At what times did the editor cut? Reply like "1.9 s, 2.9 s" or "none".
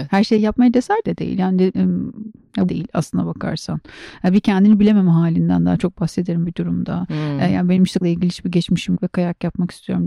1.0 s, 1.7 s, 2.7 s, 6.4 s, 8.0 s, 8.9 s